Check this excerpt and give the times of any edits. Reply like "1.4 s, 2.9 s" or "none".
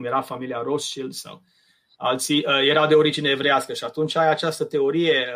none